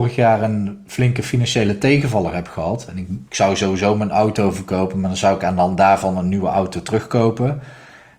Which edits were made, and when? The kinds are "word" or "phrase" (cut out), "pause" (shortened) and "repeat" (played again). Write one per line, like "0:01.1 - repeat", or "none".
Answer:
0:03.3 - pause